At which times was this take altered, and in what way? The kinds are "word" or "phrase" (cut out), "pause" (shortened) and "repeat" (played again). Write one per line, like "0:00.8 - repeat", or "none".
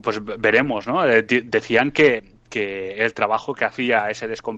none